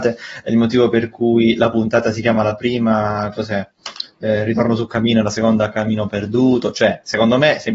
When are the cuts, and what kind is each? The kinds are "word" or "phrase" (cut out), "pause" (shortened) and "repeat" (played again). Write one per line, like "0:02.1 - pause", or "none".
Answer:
none